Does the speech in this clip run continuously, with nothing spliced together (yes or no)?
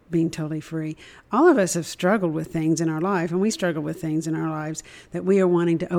no